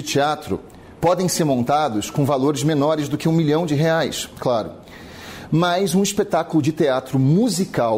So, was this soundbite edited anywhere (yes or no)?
no